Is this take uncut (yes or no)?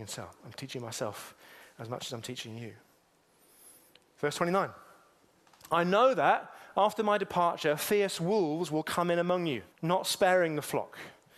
no